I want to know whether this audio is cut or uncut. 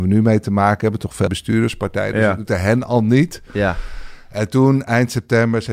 cut